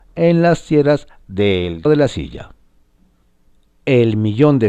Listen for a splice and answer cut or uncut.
cut